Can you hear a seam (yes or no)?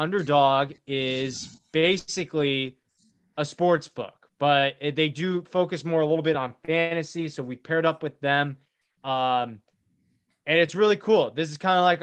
no